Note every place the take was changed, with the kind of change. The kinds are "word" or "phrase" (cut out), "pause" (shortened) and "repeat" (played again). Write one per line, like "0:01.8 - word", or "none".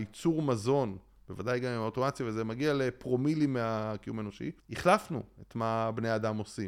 0:04.6 - pause